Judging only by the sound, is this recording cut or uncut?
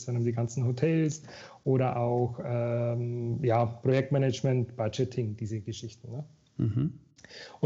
uncut